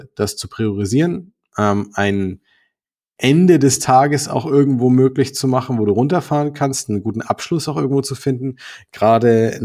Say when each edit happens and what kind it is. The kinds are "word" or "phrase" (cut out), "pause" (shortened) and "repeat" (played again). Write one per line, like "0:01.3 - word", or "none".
none